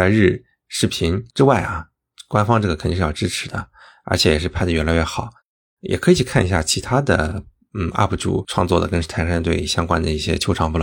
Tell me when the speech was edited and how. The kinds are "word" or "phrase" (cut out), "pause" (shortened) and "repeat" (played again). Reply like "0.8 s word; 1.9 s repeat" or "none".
none